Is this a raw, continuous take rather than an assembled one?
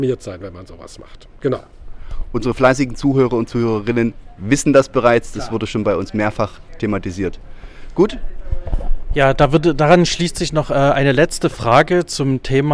yes; 0 cuts

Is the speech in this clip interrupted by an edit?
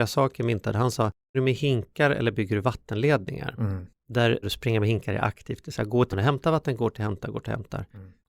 yes; 3 cuts; at 1.3 s, 4.4 s, 6.1 s

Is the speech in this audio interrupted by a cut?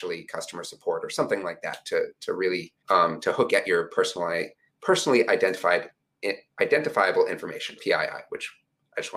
yes; 3 cuts; at 2.8 s, 3.5 s, 7.8 s

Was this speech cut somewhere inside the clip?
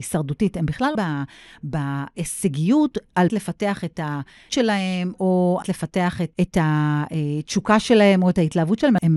yes; 5 cuts; at 0.9 s, 3.3 s, 4.5 s, 5.6 s, 6.3 s

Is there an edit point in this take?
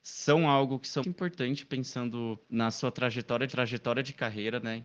yes; 3 cuts; at 1.0 s, 2.4 s, 3.5 s

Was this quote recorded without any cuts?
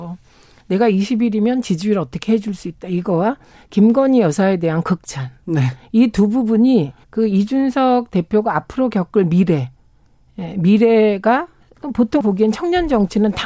no; 2 cuts; at 7.0 s, 12.2 s

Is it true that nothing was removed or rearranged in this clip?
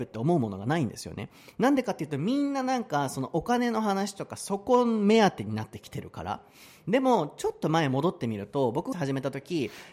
no; 1 cut; at 8.9 s

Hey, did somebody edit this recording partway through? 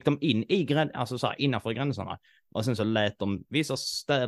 no; 0 cuts

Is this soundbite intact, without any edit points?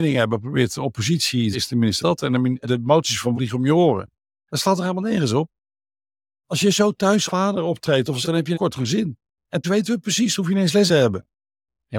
no; 9 cuts; at 1.5 s, 2.0 s, 2.6 s, 3.3 s, 7.3 s, 8.2 s, 8.5 s, 9.6 s, 10.9 s

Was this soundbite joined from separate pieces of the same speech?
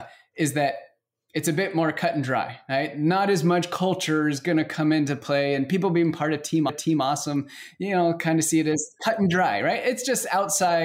yes; 1 cut; at 6.7 s

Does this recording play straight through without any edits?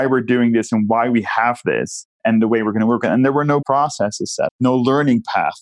no; 2 cuts; at 3.6 s, 4.5 s

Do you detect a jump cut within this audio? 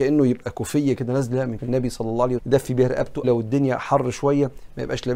yes; 4 cuts; at 0.9 s, 1.6 s, 2.4 s, 3.2 s

